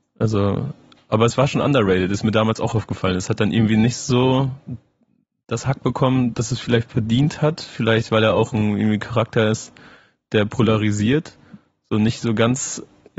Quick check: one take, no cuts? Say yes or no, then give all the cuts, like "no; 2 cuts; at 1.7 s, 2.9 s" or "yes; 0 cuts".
yes; 0 cuts